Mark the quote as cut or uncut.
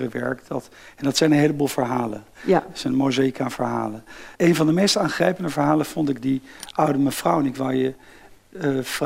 cut